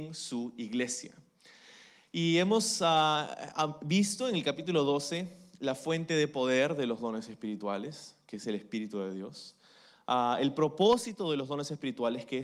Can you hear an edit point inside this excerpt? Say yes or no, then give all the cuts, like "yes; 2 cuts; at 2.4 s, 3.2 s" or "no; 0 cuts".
no; 0 cuts